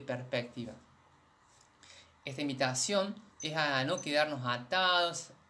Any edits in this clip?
yes; 1 cut; at 3.3 s

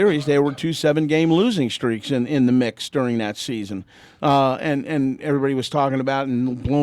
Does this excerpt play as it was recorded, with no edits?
yes; 0 cuts

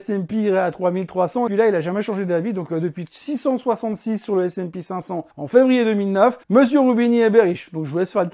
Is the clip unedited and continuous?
no; 3 cuts; at 1.5 s, 5.3 s, 6.4 s

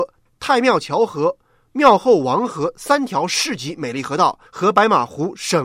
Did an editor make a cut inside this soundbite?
yes; 1 cut; at 4.5 s

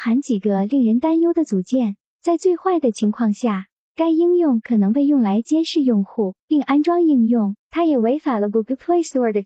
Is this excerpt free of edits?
no; 1 cut; at 7.6 s

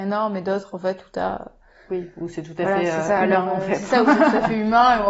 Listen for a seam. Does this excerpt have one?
no; 0 cuts

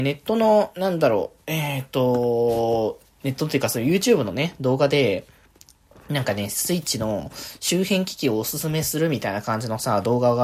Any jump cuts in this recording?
no; 0 cuts

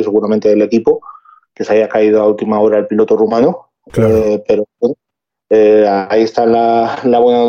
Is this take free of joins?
yes; 0 cuts

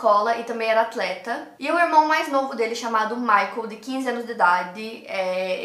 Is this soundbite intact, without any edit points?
yes; 0 cuts

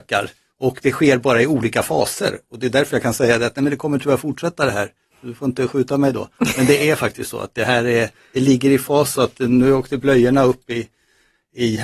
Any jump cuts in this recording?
no; 0 cuts

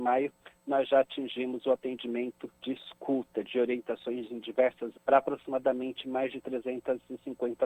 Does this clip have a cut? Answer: yes; 2 cuts; at 2.5 s, 4.9 s

